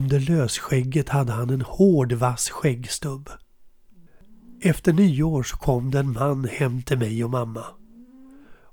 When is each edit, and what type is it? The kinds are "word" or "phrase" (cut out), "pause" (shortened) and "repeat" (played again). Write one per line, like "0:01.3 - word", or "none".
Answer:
none